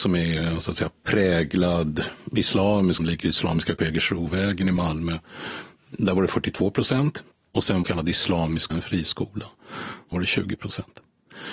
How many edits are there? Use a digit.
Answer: 6